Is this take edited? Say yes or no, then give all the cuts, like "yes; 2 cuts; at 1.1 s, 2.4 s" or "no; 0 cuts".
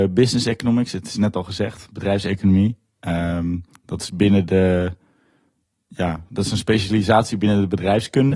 no; 0 cuts